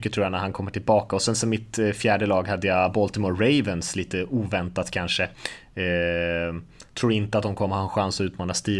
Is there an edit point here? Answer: no; 0 cuts

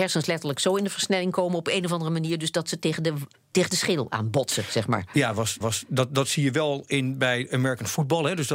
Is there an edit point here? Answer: yes; 1 cut; at 5.6 s

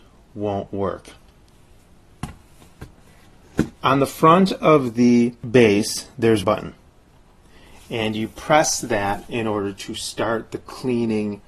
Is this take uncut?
no; 2 cuts; at 3.8 s, 6.4 s

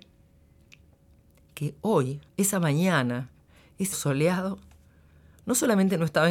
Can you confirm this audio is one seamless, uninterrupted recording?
no; 2 cuts; at 2.3 s, 3.9 s

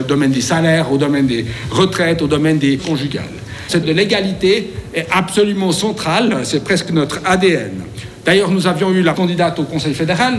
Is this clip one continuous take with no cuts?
no; 3 cuts; at 2.8 s, 3.8 s, 9.1 s

